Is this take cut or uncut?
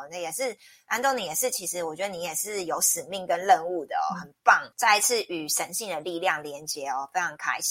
cut